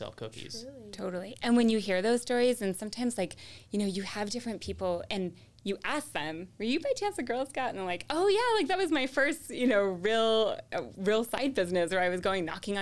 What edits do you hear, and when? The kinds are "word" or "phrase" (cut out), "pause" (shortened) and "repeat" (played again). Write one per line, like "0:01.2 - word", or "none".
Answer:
0:06.5 - pause